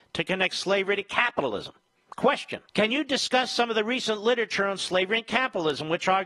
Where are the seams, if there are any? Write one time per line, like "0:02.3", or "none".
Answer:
0:02.7